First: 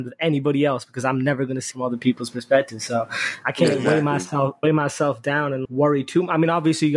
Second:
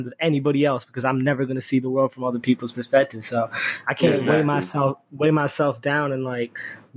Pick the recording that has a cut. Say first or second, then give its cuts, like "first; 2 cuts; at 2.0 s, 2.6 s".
first; 3 cuts; at 1.7 s, 4.6 s, 5.7 s